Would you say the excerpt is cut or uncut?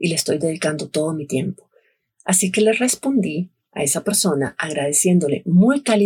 uncut